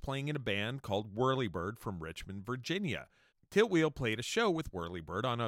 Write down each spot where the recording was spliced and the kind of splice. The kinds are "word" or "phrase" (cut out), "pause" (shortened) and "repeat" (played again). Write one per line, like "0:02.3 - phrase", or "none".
none